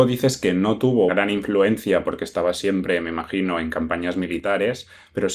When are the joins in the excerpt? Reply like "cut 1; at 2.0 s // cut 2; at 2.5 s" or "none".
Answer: cut 1; at 1.1 s